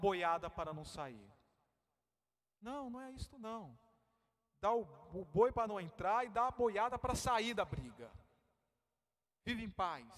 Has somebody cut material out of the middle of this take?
no; 0 cuts

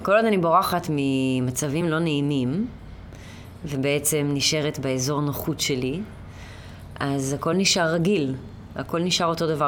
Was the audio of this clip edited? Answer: no; 0 cuts

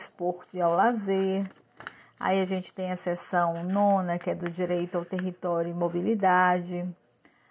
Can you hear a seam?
no; 0 cuts

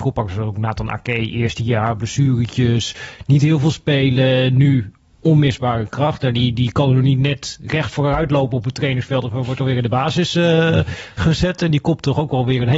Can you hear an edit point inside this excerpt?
no; 0 cuts

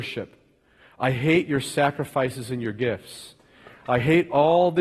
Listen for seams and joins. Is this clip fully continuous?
yes; 0 cuts

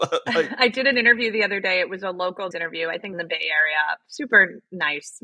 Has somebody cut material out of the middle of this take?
yes; 2 cuts; at 2.5 s, 3.1 s

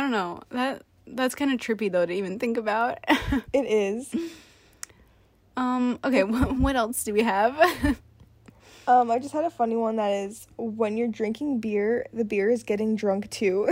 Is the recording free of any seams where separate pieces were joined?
yes; 0 cuts

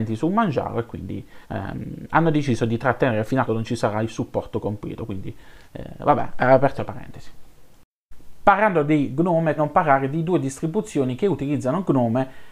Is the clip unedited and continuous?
no; 5 cuts; at 1.4 s, 3.5 s, 5.6 s, 6.8 s, 9.6 s

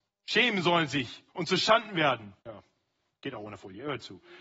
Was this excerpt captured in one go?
no; 2 cuts; at 1.3 s, 2.4 s

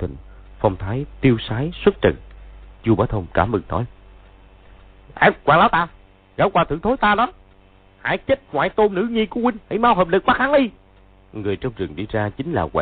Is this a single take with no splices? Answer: no; 1 cut; at 9.6 s

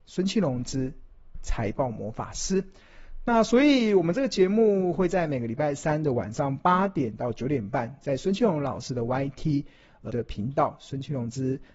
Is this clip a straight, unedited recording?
no; 1 cut; at 10.1 s

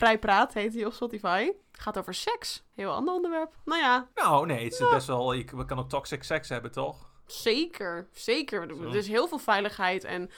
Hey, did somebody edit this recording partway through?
yes; 2 cuts; at 1.6 s, 4.1 s

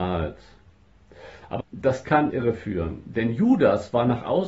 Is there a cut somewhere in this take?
yes; 2 cuts; at 1.6 s, 2.3 s

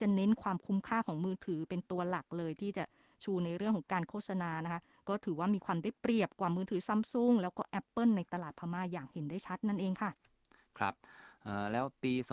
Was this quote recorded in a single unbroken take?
yes; 0 cuts

